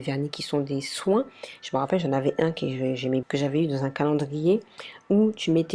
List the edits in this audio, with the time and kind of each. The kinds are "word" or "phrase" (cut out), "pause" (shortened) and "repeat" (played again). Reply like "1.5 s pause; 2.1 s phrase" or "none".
3.2 s word